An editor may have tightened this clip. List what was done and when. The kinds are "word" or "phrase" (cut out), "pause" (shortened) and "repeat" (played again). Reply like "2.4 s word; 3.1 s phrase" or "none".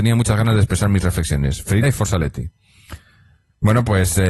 1.8 s word